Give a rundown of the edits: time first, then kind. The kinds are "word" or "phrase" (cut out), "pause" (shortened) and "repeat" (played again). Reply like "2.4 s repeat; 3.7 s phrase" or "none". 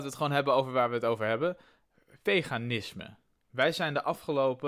3.2 s pause